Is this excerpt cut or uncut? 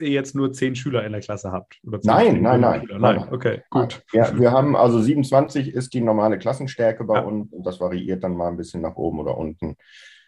uncut